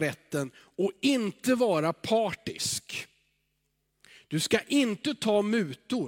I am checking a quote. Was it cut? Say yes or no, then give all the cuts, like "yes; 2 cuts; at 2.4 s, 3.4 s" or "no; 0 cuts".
no; 0 cuts